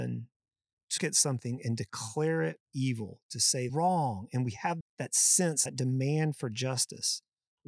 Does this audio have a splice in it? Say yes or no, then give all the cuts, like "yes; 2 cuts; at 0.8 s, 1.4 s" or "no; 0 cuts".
yes; 5 cuts; at 1.0 s, 2.6 s, 3.7 s, 4.8 s, 5.7 s